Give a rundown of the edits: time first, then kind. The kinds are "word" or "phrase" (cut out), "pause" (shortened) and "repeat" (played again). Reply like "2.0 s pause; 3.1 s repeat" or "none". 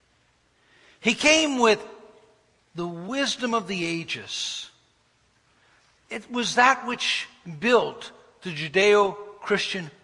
none